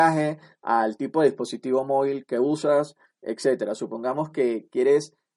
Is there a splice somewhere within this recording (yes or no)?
no